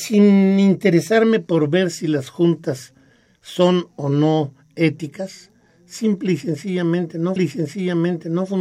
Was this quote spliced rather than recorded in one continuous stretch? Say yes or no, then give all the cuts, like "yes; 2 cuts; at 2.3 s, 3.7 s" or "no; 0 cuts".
yes; 1 cut; at 7.4 s